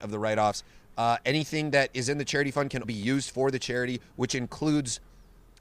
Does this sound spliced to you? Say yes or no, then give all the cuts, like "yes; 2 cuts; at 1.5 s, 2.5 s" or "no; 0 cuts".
yes; 1 cut; at 2.8 s